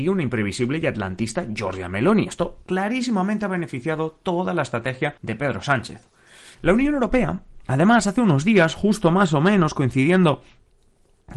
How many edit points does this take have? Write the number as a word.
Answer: four